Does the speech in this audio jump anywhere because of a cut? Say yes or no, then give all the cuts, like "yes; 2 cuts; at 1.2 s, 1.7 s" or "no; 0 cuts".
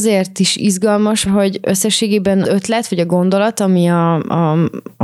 yes; 2 cuts; at 1.3 s, 2.4 s